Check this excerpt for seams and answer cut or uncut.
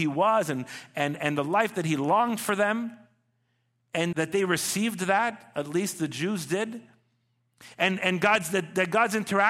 cut